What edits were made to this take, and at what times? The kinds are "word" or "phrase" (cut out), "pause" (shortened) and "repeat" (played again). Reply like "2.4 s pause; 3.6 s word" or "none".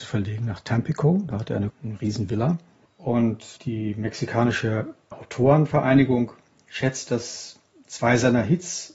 1.7 s phrase; 3.6 s pause